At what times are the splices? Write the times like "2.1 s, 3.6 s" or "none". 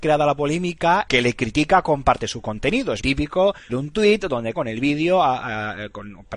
1.1 s, 3.0 s, 3.7 s, 4.5 s